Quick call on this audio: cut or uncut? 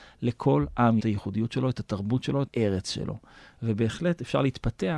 cut